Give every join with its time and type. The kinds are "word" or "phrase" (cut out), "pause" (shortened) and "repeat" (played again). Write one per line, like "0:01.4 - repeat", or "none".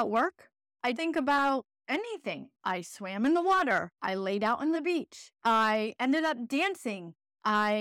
0:00.9 - word
0:01.7 - pause
0:03.9 - pause
0:04.7 - phrase
0:05.3 - pause